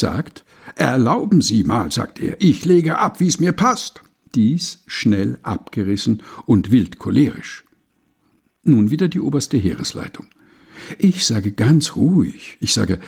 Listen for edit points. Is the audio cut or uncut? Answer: uncut